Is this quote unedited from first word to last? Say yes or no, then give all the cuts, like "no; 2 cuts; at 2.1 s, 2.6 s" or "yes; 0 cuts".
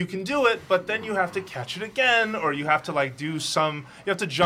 yes; 0 cuts